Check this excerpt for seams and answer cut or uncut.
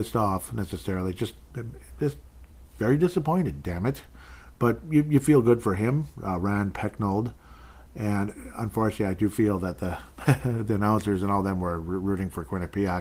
uncut